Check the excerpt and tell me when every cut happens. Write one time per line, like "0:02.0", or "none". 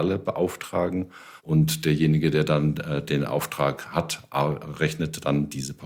0:01.4

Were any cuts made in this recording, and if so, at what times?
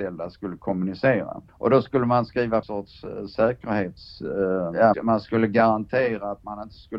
0:01.5
0:02.6
0:04.9

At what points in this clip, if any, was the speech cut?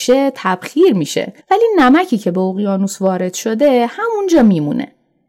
0:01.4

